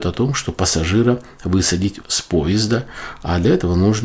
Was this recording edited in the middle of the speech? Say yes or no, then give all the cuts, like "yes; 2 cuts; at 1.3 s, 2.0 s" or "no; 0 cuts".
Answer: yes; 1 cut; at 2.0 s